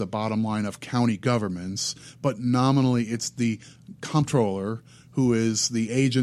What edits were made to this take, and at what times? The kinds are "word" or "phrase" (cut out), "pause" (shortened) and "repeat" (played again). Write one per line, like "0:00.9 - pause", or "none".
none

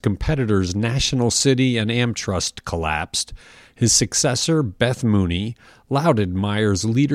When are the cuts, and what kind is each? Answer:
none

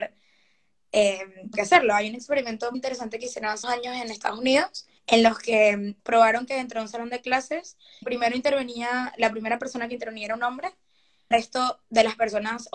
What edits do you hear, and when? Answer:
0:01.5 - word
0:02.7 - word
0:03.6 - word
0:05.0 - pause
0:06.0 - pause
0:08.0 - word
0:11.3 - word

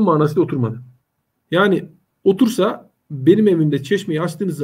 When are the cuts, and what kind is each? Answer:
0:01.0 - pause
0:03.0 - pause

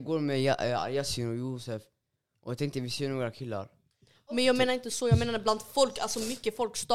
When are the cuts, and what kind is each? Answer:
none

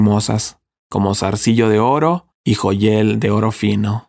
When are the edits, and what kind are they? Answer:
0:02.3 - pause

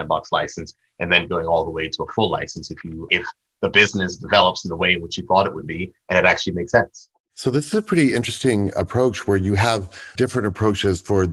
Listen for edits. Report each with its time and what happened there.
0:03.1 - word
0:10.2 - word

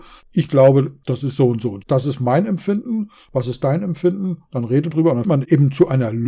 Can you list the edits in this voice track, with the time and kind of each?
0:01.8 - word
0:04.9 - word
0:05.2 - word

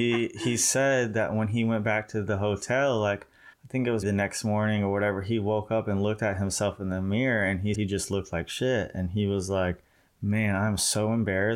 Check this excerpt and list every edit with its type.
0:03.5 - pause
0:04.0 - word
0:07.7 - word
0:10.0 - pause

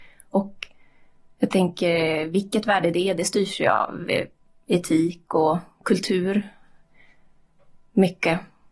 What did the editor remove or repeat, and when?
none

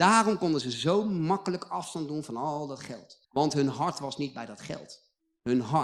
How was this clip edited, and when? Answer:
0:03.2 - pause

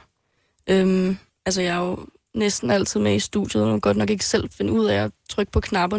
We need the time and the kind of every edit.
none

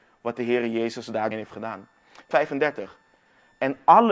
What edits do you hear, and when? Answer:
0:01.3 - word
0:02.3 - word

